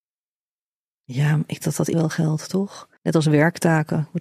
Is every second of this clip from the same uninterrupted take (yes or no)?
no